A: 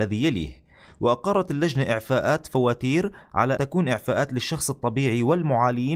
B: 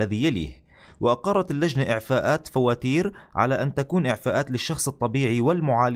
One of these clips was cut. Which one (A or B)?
A